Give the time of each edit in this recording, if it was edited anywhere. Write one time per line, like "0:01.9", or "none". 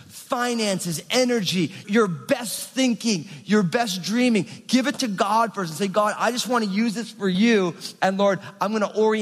0:01.8